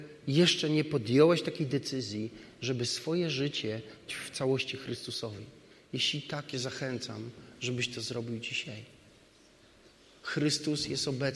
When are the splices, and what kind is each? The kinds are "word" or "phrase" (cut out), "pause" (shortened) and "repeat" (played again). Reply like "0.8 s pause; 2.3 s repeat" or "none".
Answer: 4.1 s word; 6.5 s phrase

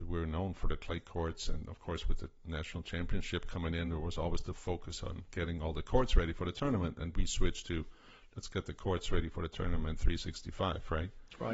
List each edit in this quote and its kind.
none

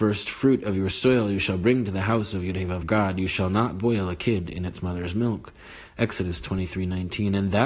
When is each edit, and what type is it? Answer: 2.8 s word

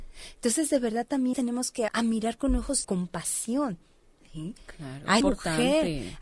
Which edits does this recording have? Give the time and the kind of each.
1.3 s word; 1.9 s word; 2.8 s word; 5.2 s word

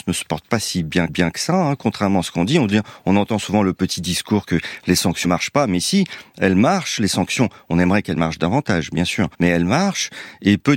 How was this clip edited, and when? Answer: 1.1 s repeat; 5.2 s word; 9.3 s pause

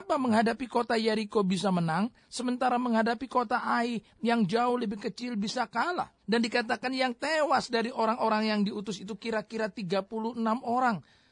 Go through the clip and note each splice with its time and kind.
6.2 s pause

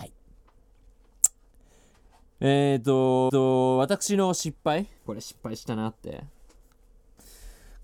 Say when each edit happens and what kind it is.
3.3 s repeat; 5.0 s pause

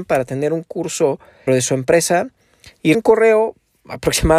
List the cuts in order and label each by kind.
1.5 s word; 2.9 s word

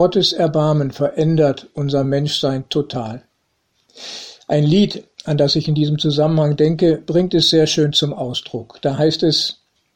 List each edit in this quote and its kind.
none

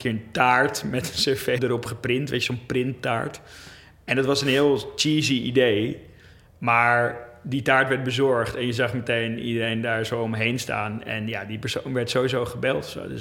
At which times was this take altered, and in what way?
1.6 s word

